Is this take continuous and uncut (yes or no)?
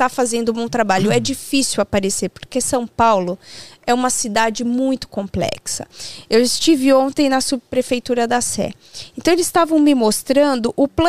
yes